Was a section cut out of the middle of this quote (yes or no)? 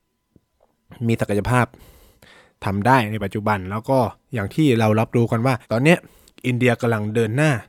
yes